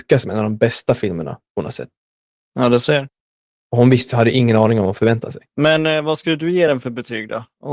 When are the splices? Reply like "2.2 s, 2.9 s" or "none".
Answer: none